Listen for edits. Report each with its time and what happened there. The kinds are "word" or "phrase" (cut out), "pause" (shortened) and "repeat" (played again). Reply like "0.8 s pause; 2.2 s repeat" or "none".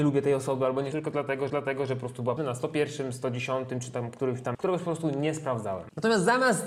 0.9 s word; 1.5 s repeat; 2.4 s word; 4.5 s word